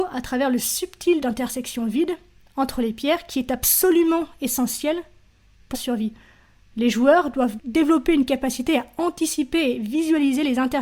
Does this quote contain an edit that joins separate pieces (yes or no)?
yes